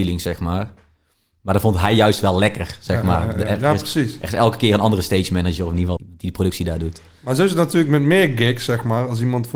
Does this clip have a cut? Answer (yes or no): yes